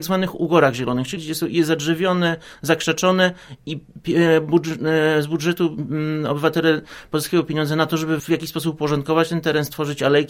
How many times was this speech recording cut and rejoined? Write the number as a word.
two